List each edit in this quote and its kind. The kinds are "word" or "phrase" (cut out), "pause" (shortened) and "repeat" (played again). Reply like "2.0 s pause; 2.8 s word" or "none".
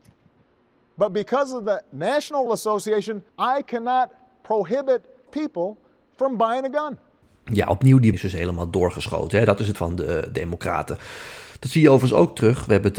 2.5 s word; 3.3 s pause; 5.3 s word; 8.1 s word; 9.8 s word